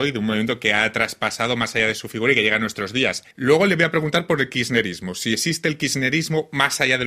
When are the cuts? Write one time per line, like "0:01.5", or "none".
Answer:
0:03.3